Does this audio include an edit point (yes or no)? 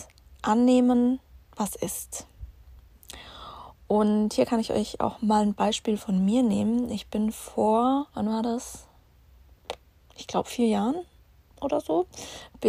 yes